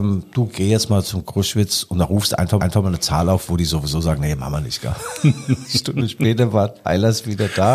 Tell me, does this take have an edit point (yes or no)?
yes